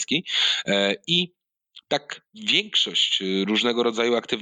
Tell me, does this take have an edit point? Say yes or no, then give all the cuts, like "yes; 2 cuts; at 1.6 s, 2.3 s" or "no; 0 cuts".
yes; 1 cut; at 2.3 s